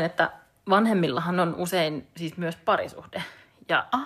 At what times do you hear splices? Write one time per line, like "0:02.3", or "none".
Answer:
none

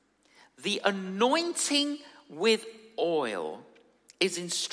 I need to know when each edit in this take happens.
none

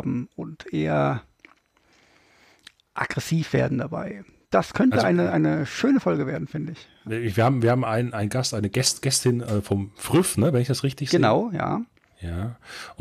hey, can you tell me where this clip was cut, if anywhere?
none

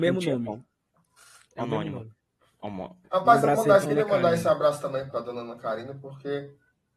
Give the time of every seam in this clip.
0:03.0
0:03.8
0:05.1

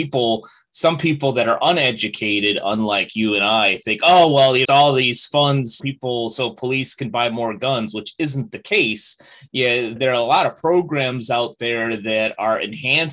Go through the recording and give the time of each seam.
0:04.6
0:05.8
0:10.0

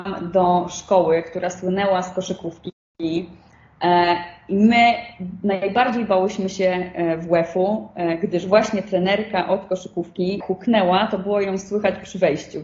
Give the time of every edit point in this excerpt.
0:10.4

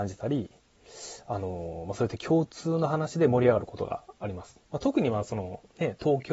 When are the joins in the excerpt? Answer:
0:04.6

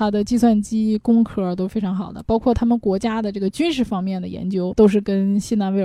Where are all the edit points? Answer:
0:04.7

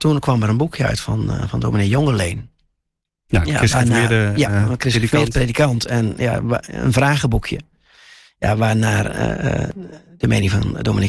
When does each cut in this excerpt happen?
none

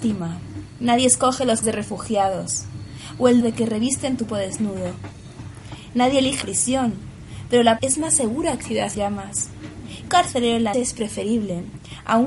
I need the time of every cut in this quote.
0:01.6
0:03.4
0:04.3
0:06.4
0:07.8
0:08.6
0:08.9
0:10.1
0:10.7

